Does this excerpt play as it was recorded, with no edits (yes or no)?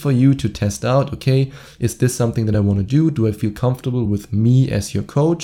yes